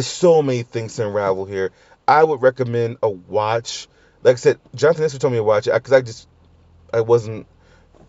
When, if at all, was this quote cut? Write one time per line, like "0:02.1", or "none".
none